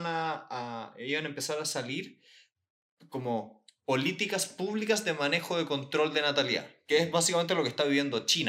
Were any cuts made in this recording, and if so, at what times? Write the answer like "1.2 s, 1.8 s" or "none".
none